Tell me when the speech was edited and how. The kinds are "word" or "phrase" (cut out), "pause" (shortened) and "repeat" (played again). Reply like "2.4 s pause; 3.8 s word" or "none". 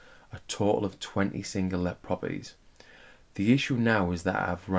none